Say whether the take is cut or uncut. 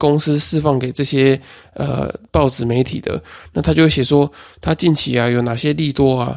uncut